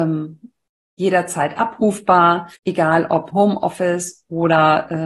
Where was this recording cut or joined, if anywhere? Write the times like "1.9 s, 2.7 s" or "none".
2.6 s, 3.3 s